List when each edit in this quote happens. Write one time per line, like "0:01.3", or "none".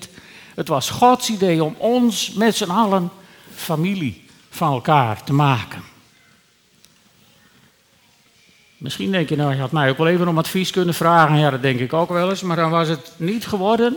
none